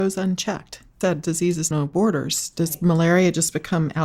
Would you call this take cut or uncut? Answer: cut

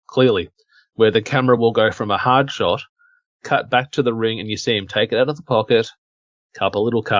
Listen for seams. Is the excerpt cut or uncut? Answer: uncut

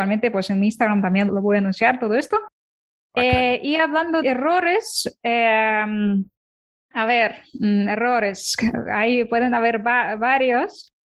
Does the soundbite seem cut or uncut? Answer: cut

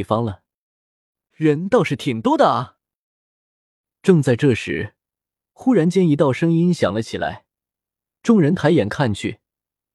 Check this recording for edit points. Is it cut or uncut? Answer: uncut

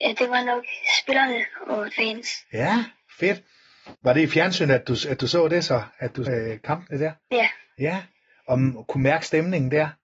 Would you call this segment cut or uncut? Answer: cut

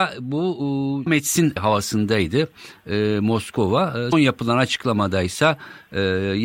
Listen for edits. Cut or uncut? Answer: cut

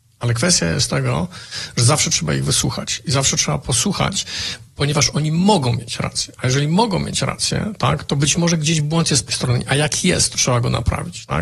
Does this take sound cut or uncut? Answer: cut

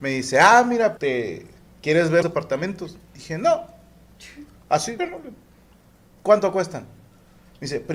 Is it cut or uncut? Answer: cut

